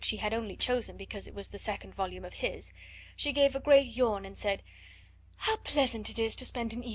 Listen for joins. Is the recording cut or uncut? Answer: uncut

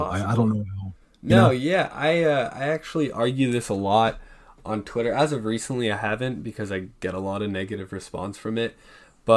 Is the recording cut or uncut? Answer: uncut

